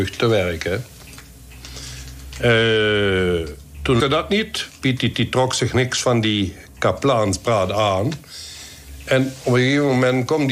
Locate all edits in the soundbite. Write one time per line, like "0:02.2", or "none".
0:04.0
0:05.1